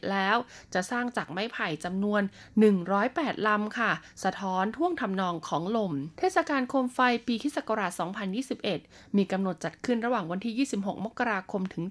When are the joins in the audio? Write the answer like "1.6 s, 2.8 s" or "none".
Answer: 6.1 s